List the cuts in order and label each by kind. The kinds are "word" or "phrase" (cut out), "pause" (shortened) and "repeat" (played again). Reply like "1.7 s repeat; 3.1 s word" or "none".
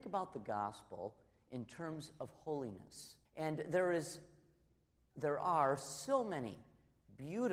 3.3 s pause